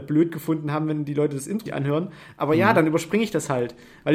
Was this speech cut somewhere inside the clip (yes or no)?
yes